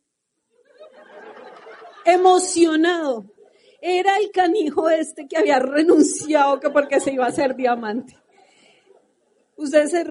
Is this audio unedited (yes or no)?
yes